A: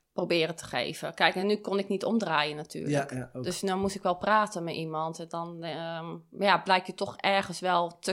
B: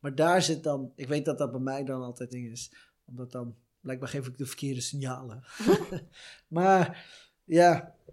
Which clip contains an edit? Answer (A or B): B